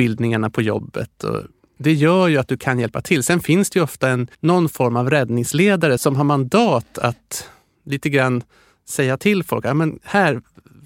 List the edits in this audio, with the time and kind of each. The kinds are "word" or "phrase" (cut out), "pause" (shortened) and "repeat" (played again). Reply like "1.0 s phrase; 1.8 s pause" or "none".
4.3 s pause; 6.0 s phrase